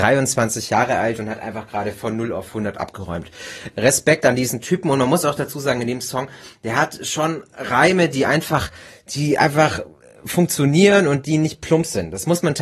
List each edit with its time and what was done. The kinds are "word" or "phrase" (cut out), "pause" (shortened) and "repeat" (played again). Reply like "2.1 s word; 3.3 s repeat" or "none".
none

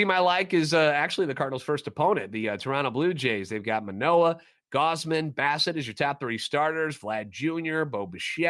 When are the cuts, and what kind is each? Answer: none

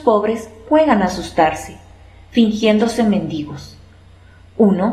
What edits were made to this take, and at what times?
none

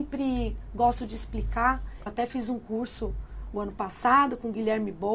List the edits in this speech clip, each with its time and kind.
2.1 s word

